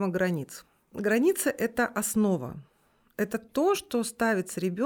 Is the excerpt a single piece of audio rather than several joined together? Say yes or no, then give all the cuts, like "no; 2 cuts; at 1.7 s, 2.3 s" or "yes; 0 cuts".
yes; 0 cuts